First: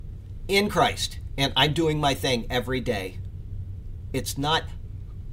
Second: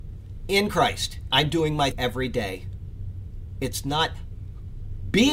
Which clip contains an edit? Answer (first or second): second